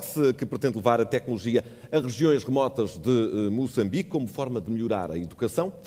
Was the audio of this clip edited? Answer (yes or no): no